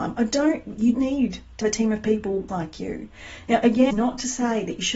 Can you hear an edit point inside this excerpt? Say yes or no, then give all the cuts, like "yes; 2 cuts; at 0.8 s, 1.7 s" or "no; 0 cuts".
yes; 4 cuts; at 0.9 s, 1.6 s, 2.5 s, 3.9 s